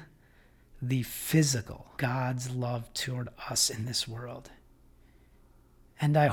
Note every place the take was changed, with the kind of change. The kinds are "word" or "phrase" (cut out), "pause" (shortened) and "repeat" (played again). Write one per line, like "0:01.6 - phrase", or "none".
0:02.0 - phrase

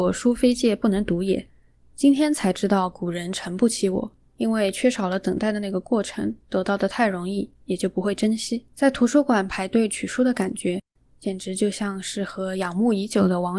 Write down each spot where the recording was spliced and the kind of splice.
0:04.3 - pause
0:08.7 - pause

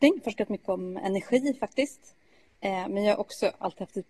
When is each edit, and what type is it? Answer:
none

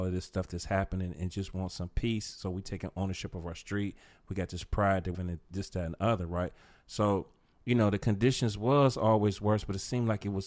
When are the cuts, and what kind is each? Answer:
0:05.1 - phrase

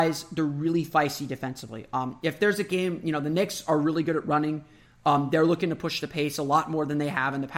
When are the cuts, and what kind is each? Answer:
none

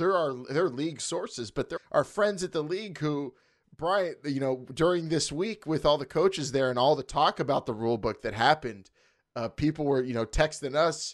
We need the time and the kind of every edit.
0:01.8 - word

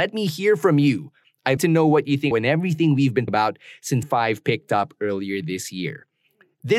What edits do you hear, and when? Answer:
0:01.6 - word
0:02.3 - phrase
0:03.3 - word
0:04.0 - word

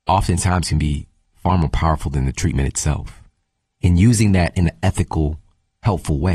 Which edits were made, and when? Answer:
none

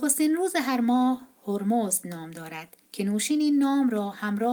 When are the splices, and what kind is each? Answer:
0:02.8 - pause

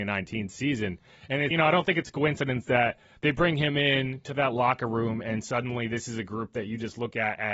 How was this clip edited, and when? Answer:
0:01.5 - word

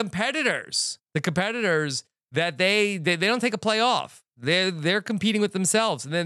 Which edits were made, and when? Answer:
0:01.0 - pause

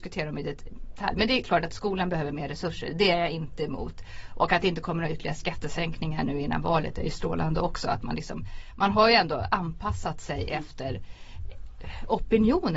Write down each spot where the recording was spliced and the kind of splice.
none

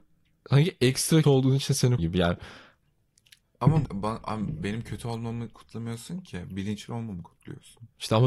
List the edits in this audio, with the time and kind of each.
0:01.2 - word
0:02.0 - word
0:03.9 - word

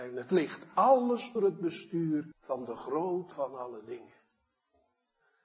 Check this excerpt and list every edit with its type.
0:01.4 - word
0:02.3 - pause
0:03.3 - word

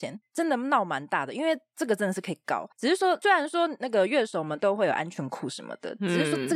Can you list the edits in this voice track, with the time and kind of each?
0:02.7 - pause

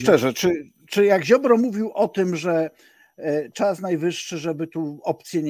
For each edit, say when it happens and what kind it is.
none

